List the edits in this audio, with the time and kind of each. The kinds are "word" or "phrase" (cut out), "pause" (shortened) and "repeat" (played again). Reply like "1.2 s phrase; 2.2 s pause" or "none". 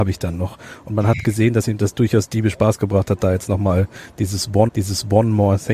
4.7 s repeat